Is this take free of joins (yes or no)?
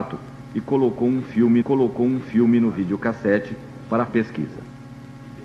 no